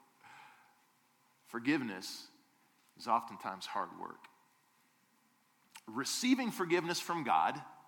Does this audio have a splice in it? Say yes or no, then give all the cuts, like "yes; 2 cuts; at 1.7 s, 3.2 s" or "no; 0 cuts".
no; 0 cuts